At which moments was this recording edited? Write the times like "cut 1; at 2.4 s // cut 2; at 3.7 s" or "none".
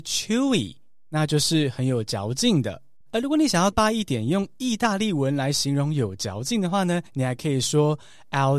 cut 1; at 3.0 s // cut 2; at 3.7 s // cut 3; at 7.1 s